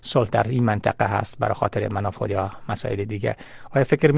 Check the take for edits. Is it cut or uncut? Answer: cut